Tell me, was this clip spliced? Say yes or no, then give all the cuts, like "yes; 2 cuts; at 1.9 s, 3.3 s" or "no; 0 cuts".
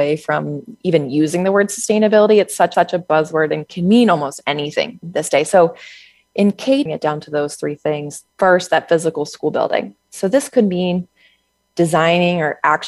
yes; 4 cuts; at 2.7 s, 5.0 s, 6.9 s, 8.3 s